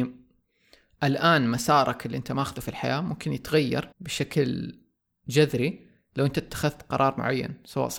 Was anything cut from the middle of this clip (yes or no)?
yes